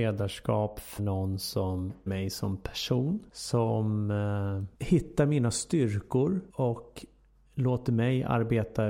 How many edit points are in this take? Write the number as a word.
five